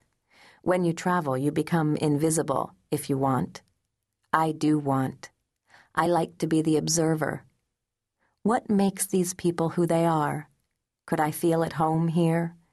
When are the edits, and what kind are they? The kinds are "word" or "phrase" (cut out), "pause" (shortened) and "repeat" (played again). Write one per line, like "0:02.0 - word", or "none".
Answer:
none